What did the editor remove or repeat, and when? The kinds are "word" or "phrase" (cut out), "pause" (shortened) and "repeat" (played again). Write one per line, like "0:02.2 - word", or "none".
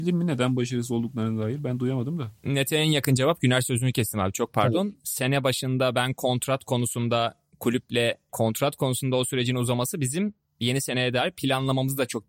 0:02.4 - pause
0:08.3 - phrase